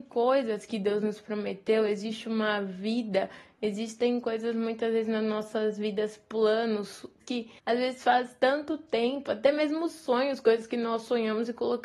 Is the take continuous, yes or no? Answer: no